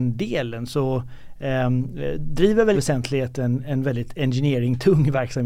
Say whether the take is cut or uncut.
cut